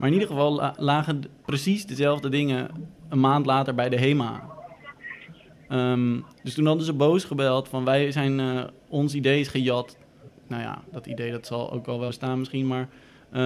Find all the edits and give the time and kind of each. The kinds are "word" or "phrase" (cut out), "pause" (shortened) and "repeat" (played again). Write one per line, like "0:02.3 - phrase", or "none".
0:06.3 - pause
0:08.8 - pause
0:12.1 - word